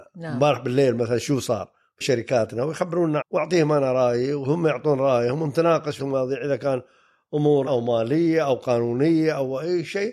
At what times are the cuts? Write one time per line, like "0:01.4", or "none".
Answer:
0:02.0
0:03.2
0:06.0
0:07.7